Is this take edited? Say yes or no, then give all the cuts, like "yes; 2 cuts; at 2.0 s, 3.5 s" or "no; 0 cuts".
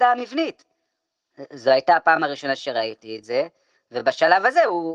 no; 0 cuts